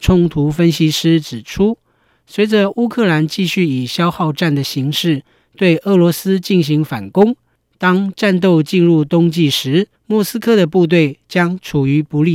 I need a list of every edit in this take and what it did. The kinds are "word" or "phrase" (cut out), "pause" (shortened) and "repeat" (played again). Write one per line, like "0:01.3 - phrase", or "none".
0:09.9 - pause